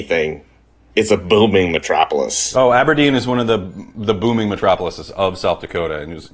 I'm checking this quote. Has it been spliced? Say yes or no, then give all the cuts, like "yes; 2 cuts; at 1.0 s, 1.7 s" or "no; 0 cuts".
no; 0 cuts